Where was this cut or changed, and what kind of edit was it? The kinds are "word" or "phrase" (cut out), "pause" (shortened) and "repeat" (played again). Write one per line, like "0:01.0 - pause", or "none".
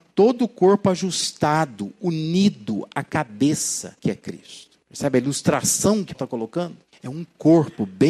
0:04.0 - pause
0:04.8 - pause
0:06.1 - word
0:06.9 - pause

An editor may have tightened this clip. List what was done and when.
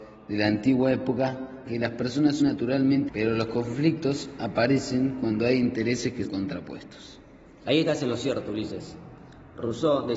0:01.7 - phrase
0:02.4 - word
0:03.1 - word
0:06.2 - word

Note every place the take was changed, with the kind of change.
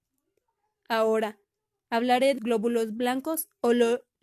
0:02.4 - word

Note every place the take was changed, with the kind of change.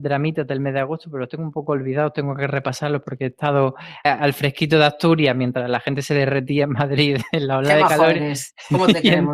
0:04.0 - word

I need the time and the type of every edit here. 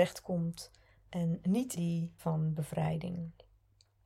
0:01.8 - word
0:02.2 - word

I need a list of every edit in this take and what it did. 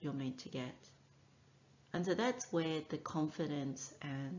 none

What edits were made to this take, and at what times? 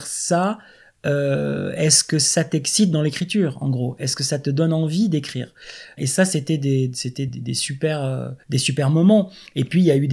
0:06.0 - word
0:07.3 - word
0:08.4 - pause

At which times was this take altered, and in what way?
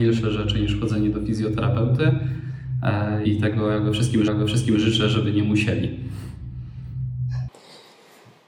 0:03.2 - word
0:04.3 - repeat

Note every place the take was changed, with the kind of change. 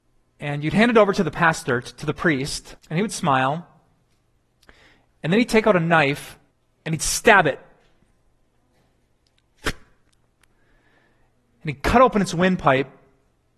0:02.8 - pause
0:06.5 - pause

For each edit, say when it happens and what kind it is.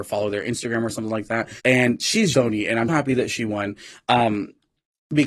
0:01.6 - pause
0:02.3 - word
0:02.9 - word

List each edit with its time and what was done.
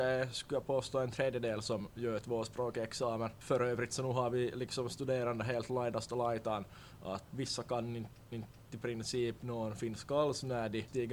0:07.3 - word
0:08.3 - repeat

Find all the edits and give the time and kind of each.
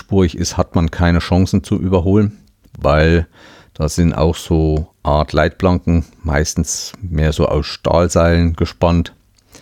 none

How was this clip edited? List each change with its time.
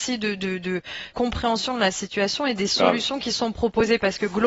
0:01.1 - word

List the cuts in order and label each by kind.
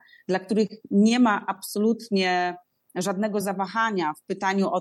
none

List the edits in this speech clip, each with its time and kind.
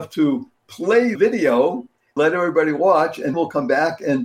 0:01.2 - word
0:02.2 - word
0:03.3 - word

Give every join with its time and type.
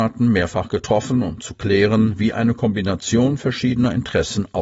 none

